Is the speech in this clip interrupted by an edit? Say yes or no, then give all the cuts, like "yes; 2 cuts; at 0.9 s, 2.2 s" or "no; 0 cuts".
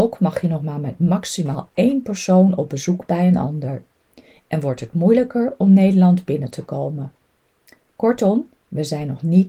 no; 0 cuts